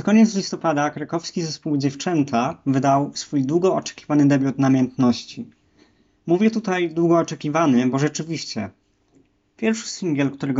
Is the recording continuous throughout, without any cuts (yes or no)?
yes